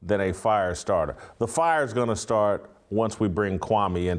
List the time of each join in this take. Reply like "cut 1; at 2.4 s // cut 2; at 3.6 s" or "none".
none

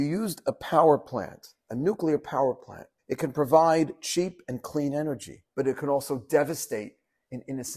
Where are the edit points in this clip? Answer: cut 1; at 3.0 s // cut 2; at 5.5 s

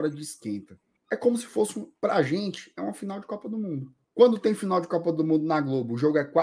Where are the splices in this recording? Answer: cut 1; at 1.0 s // cut 2; at 4.0 s

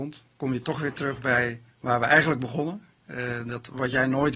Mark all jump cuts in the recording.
cut 1; at 1.7 s

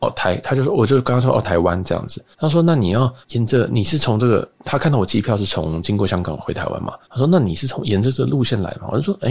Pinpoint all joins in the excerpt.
cut 1; at 2.3 s // cut 2; at 3.2 s // cut 3; at 4.5 s // cut 4; at 7.0 s

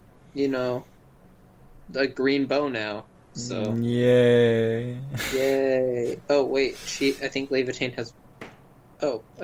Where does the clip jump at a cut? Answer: none

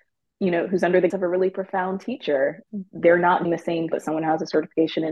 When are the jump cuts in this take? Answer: cut 1; at 1.1 s // cut 2; at 3.4 s // cut 3; at 3.9 s

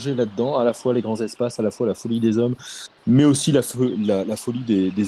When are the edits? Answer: none

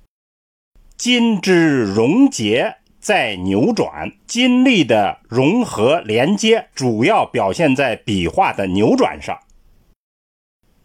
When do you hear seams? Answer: cut 1; at 4.2 s // cut 2; at 6.7 s

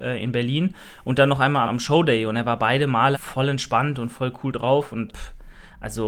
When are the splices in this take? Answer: cut 1; at 1.7 s // cut 2; at 3.1 s // cut 3; at 5.1 s

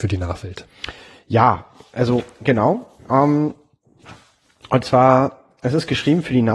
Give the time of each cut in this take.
cut 1; at 3.0 s

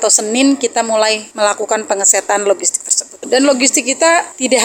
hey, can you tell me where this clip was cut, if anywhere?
none

